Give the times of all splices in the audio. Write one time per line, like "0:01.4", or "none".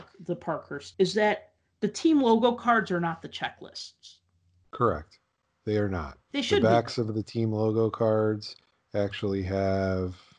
0:00.9
0:06.2

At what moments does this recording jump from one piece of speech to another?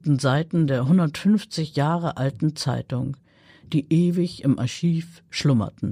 none

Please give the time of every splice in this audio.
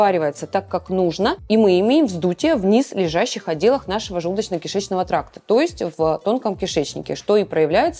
none

